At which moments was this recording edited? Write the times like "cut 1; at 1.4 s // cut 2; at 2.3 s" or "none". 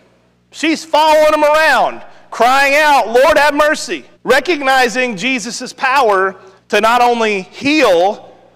cut 1; at 4.1 s // cut 2; at 6.6 s